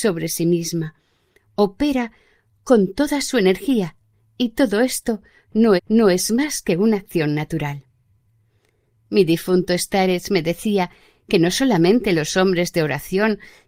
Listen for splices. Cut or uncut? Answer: cut